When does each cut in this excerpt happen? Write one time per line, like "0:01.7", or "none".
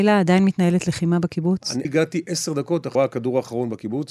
0:01.8
0:02.9